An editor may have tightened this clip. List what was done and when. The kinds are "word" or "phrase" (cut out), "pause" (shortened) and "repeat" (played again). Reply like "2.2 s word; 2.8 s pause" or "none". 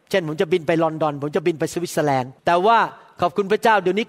2.4 s pause